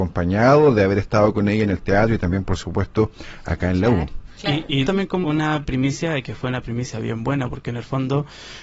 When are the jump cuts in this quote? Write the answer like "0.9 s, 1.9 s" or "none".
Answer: 4.3 s, 4.8 s, 5.2 s